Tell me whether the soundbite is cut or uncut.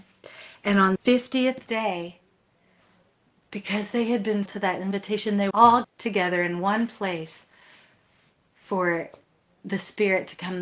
cut